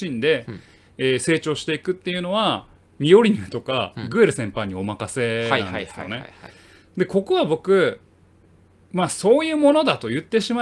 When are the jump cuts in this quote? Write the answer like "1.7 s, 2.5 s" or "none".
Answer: none